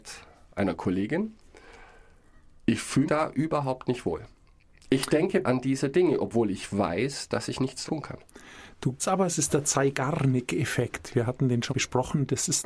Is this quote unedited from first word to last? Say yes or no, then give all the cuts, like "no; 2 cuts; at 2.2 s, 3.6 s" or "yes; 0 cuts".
no; 5 cuts; at 3.1 s, 5.4 s, 7.9 s, 9.0 s, 11.7 s